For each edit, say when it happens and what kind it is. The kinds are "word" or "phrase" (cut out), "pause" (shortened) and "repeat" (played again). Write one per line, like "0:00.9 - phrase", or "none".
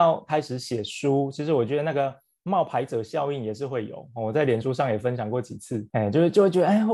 none